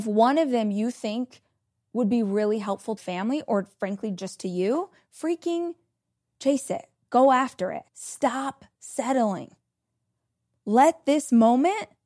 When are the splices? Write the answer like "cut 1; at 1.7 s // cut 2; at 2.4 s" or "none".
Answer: cut 1; at 3.0 s // cut 2; at 7.9 s